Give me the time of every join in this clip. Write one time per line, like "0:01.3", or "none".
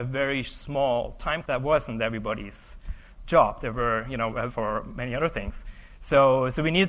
0:01.4
0:04.5